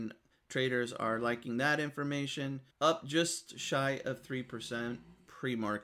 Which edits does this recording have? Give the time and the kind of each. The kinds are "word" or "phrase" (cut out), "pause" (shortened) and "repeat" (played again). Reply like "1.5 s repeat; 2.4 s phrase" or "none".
2.7 s pause